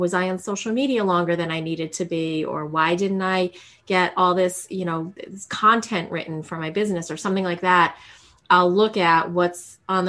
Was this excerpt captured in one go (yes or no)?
yes